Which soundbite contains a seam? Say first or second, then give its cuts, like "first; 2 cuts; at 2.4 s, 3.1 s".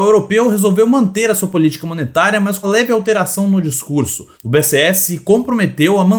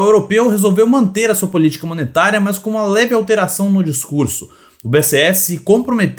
first; 2 cuts; at 2.6 s, 4.3 s